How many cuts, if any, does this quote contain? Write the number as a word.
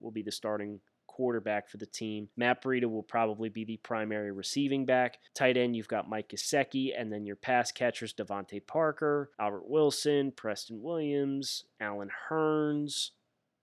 three